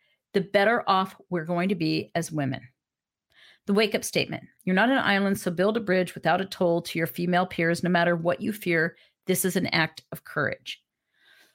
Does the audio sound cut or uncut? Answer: uncut